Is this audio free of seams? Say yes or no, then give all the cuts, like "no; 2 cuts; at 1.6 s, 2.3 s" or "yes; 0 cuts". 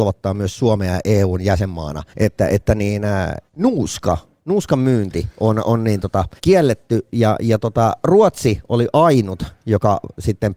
no; 3 cuts; at 2.1 s, 3.5 s, 6.4 s